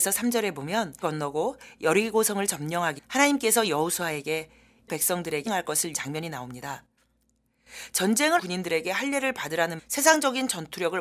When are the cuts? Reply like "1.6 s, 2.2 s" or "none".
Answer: 1.0 s, 3.0 s, 4.9 s, 5.5 s, 5.9 s, 8.4 s, 9.8 s

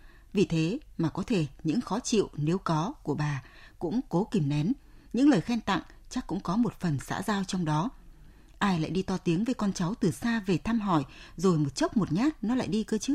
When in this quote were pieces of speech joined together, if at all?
none

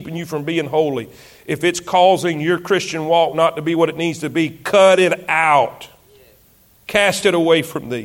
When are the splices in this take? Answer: none

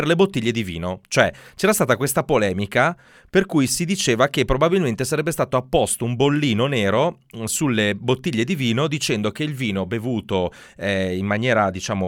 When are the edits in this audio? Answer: none

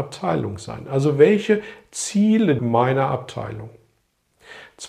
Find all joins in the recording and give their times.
2.6 s

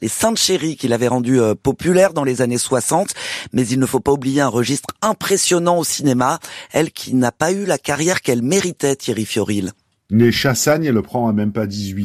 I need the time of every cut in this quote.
none

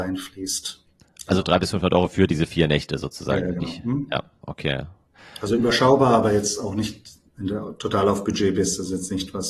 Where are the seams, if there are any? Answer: 7.3 s

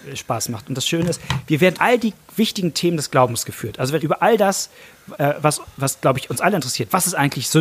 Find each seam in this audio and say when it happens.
1.7 s, 4.0 s, 5.1 s

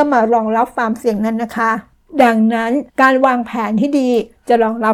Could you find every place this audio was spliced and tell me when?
2.9 s

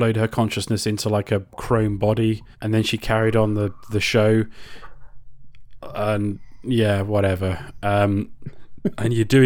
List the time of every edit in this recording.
2.5 s

